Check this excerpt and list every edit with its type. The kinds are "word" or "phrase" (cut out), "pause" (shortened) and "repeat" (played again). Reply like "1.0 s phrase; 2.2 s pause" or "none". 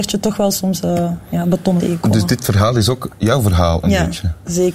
1.8 s word